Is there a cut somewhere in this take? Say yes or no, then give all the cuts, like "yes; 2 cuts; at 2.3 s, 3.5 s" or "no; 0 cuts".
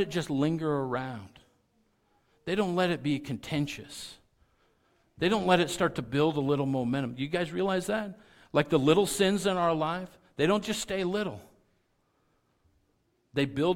no; 0 cuts